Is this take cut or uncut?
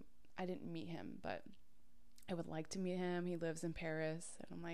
uncut